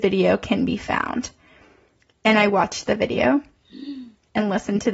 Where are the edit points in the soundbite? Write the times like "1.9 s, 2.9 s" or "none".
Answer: none